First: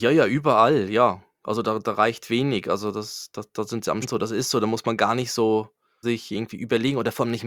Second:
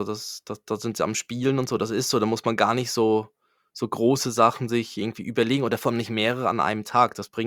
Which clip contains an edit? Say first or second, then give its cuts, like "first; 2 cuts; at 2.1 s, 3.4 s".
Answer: first; 2 cuts; at 4.0 s, 6.0 s